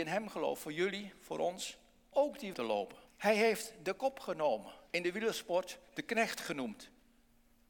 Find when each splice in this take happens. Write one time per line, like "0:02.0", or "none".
0:02.1
0:02.5
0:03.1
0:04.9

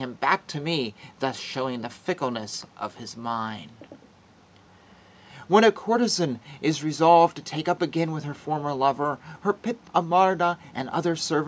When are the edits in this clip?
0:09.9

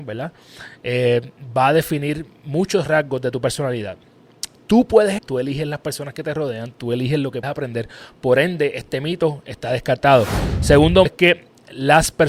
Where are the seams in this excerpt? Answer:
0:05.2
0:07.4
0:11.1

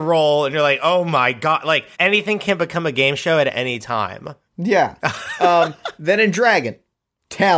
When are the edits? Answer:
0:01.9

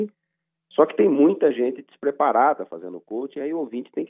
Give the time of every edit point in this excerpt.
none

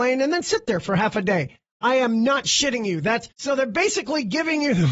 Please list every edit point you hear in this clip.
0:03.3

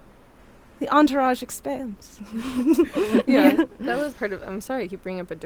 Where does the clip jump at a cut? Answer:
0:04.1

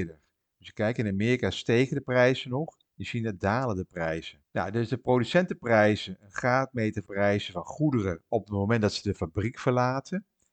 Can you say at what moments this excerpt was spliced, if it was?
0:02.8
0:04.4
0:07.1

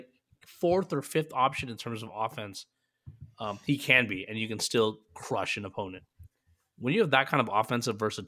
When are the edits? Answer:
none

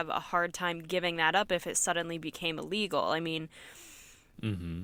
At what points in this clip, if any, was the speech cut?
none

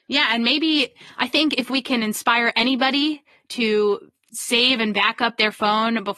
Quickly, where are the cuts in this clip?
none

